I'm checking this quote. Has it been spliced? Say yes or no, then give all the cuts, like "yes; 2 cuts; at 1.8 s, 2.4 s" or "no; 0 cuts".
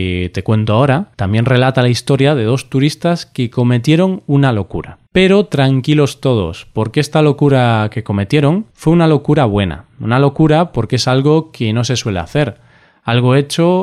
yes; 3 cuts; at 1.1 s, 5.1 s, 8.7 s